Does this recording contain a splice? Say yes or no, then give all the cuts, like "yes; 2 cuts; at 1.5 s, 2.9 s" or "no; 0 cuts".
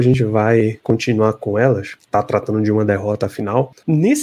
yes; 1 cut; at 2.1 s